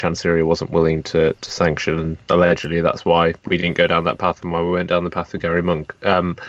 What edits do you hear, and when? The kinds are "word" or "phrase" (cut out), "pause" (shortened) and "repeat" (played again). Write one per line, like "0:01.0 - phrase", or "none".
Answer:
0:03.4 - pause